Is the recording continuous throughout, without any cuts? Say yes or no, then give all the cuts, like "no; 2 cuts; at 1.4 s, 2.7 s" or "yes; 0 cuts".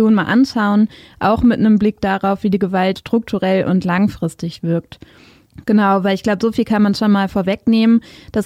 no; 1 cut; at 3.0 s